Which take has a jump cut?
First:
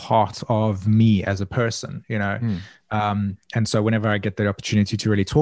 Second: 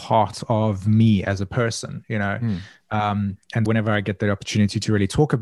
second; 1 cut; at 3.7 s

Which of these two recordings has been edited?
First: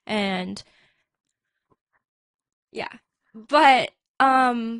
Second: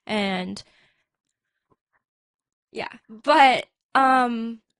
second; 1 cut; at 3.0 s

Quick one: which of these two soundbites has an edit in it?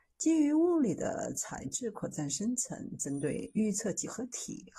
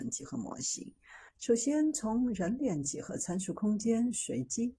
second; 1 cut; at 1.3 s

